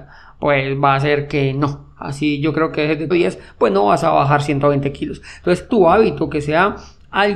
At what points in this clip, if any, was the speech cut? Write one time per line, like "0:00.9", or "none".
0:03.1
0:05.7